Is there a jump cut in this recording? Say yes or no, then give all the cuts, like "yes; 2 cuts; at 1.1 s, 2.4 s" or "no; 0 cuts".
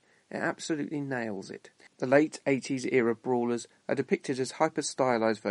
yes; 1 cut; at 1.8 s